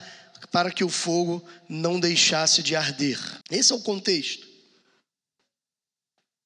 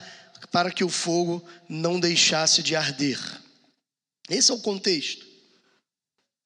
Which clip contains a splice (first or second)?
first